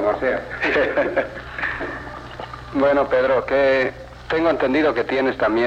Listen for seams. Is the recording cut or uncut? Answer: uncut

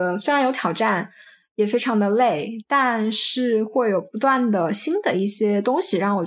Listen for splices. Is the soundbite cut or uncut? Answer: uncut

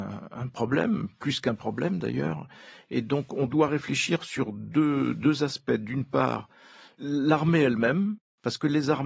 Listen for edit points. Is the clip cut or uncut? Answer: uncut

